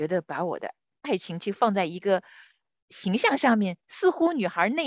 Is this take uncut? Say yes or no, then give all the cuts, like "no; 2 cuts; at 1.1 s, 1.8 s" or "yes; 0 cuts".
yes; 0 cuts